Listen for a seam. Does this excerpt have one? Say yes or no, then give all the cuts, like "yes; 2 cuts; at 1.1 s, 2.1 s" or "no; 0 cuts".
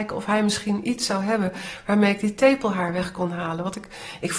no; 0 cuts